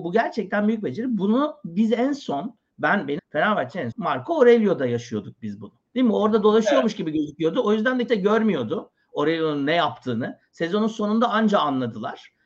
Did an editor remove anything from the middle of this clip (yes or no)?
yes